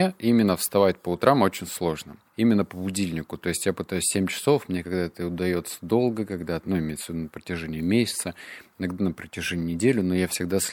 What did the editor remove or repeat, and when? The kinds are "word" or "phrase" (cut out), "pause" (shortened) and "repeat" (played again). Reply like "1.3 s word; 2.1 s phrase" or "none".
2.3 s pause

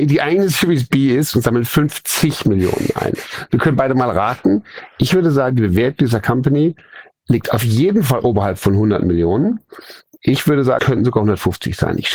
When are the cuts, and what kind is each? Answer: 10.8 s word

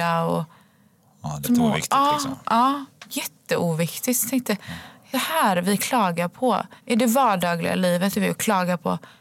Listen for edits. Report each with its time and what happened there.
1.4 s word; 5.1 s word; 6.8 s pause; 8.1 s word

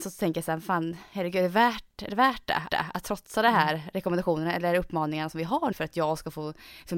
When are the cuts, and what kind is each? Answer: 2.7 s repeat; 5.7 s word

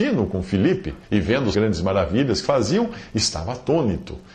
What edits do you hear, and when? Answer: 1.0 s pause; 1.5 s phrase; 2.4 s word

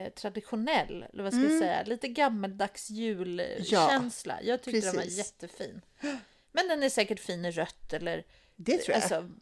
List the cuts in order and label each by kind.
none

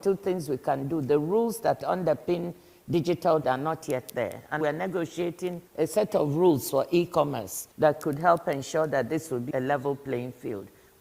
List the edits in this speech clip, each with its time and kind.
3.4 s word; 4.6 s phrase; 5.7 s pause; 7.7 s pause; 9.5 s word

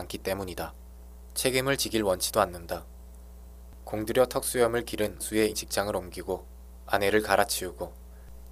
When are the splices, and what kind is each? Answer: 5.2 s word; 5.5 s word

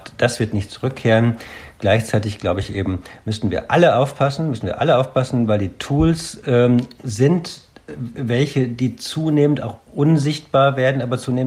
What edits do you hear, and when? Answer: none

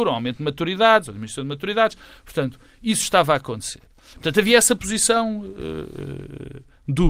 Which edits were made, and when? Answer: none

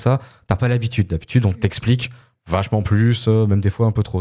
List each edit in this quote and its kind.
none

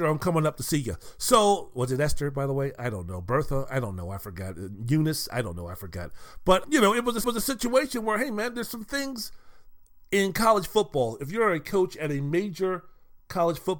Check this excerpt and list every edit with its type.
6.6 s word; 7.2 s repeat

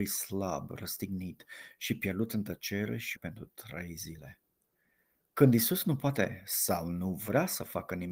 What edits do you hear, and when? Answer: 3.2 s word

